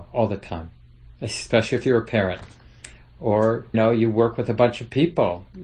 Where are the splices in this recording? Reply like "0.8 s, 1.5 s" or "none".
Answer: 3.7 s